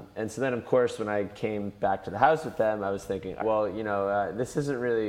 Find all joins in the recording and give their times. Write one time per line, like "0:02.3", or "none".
0:03.4